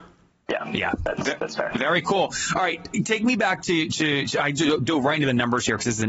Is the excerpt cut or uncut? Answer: uncut